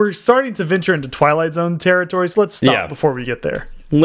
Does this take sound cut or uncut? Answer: cut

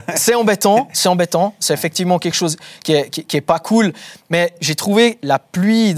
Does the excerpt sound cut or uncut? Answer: uncut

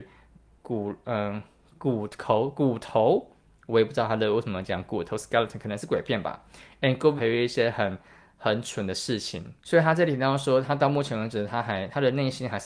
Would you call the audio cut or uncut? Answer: cut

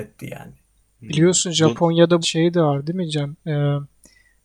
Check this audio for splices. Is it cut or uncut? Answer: cut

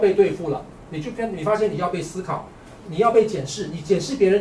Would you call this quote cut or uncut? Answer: cut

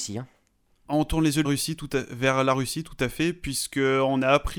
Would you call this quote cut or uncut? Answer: cut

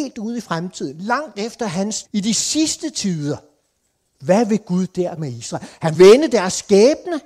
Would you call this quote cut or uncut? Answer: cut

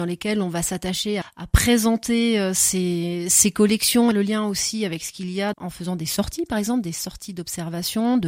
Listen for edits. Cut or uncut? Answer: cut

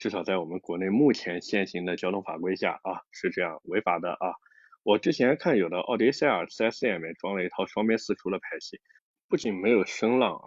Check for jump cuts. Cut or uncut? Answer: cut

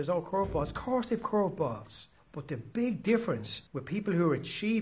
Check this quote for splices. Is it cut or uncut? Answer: cut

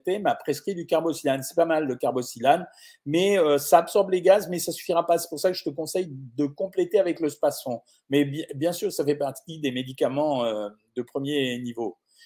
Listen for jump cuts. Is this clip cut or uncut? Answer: uncut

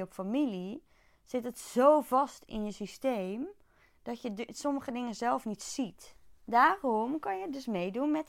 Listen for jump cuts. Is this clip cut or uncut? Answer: uncut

